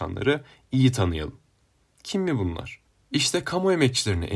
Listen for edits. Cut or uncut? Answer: uncut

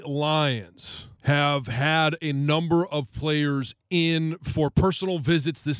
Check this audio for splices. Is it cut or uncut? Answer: cut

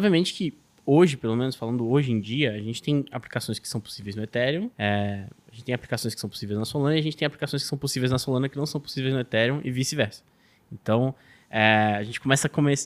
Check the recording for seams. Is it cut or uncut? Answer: cut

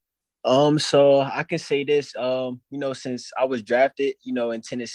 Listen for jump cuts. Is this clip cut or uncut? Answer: uncut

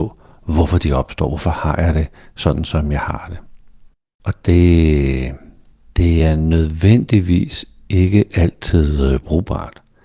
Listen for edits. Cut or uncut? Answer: uncut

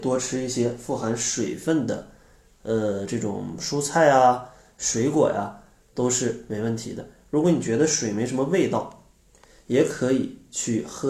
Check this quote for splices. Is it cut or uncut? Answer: uncut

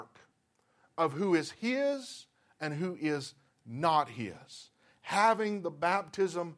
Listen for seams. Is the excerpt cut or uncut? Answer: uncut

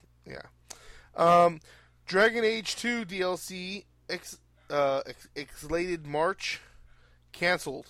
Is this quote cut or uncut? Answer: uncut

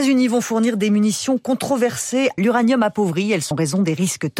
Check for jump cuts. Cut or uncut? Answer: cut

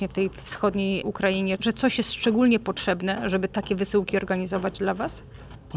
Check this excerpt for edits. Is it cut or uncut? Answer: uncut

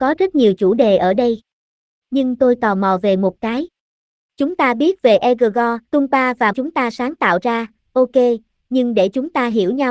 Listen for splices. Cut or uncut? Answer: cut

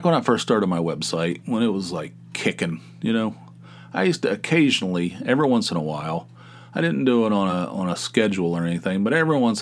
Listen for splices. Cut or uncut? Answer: uncut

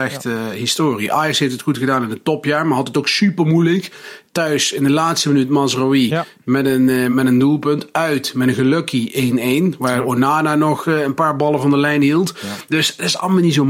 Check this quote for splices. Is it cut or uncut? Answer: cut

